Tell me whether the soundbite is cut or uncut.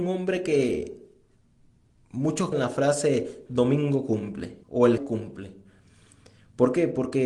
cut